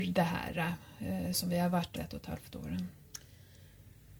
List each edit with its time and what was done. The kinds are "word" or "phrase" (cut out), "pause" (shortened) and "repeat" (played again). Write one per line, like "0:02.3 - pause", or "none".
0:01.3 - word
0:02.0 - word